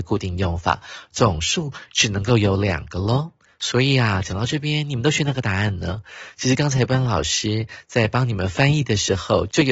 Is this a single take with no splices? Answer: yes; 0 cuts

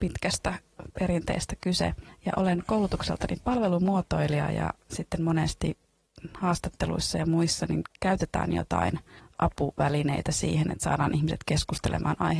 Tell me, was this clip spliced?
no; 0 cuts

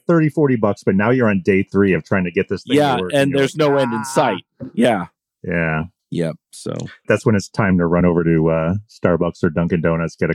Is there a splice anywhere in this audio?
no; 0 cuts

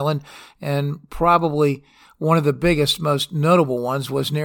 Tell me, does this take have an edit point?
no; 0 cuts

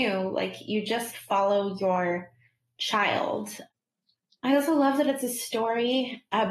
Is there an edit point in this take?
no; 0 cuts

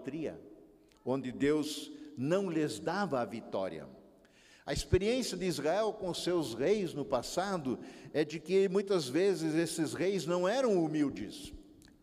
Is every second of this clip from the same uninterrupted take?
yes; 0 cuts

